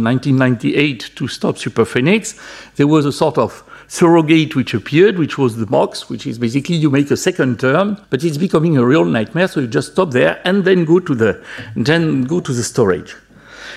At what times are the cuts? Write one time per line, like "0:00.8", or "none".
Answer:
0:08.0